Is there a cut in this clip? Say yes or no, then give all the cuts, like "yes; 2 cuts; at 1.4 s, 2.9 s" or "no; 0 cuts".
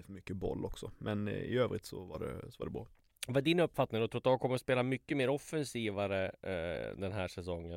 no; 0 cuts